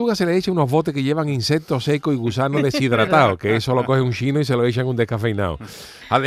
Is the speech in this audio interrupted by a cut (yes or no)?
no